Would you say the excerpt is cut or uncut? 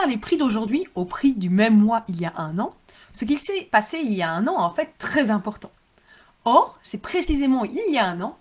uncut